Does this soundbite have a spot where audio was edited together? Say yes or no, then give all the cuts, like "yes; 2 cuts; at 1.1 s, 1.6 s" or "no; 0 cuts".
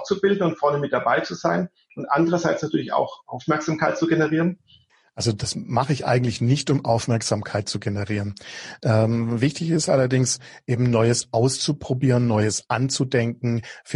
no; 0 cuts